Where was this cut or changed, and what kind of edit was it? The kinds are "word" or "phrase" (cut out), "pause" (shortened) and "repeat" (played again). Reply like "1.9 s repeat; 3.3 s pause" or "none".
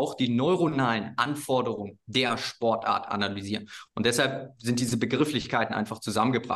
none

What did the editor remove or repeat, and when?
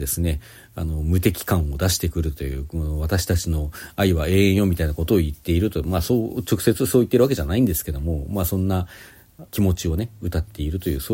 9.5 s pause

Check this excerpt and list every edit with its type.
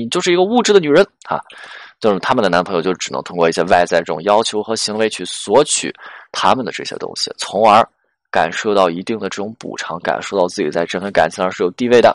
none

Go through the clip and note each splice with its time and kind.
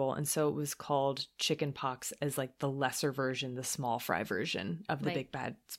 none

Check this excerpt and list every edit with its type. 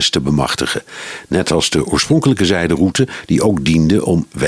none

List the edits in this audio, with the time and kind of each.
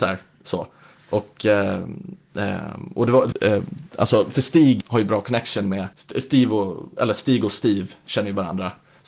3.3 s phrase; 4.8 s phrase; 5.9 s pause

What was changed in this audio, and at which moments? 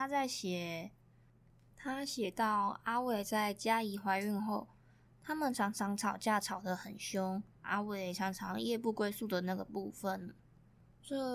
7.5 s pause

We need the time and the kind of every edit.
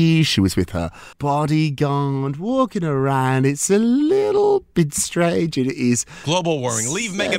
1.1 s pause

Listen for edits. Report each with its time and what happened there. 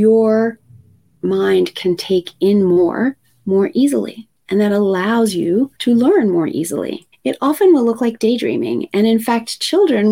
5.8 s pause; 7.1 s pause

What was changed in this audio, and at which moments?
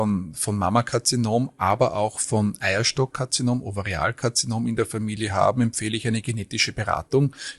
none

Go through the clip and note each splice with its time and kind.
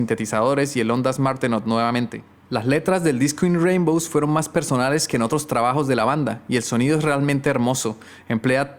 none

